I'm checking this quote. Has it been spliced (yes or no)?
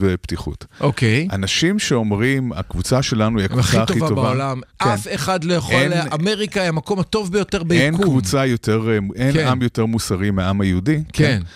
no